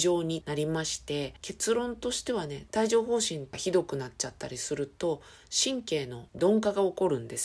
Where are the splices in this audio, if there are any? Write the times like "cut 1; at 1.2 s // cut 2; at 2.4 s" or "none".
cut 1; at 2.7 s // cut 2; at 6.3 s